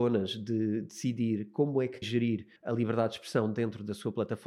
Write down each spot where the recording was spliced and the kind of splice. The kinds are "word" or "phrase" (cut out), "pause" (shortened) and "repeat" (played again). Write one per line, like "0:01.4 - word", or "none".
0:02.0 - word
0:02.6 - pause